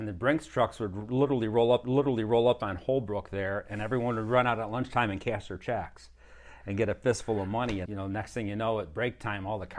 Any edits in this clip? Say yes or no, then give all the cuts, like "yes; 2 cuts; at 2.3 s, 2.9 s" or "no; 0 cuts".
yes; 2 cuts; at 1.8 s, 7.8 s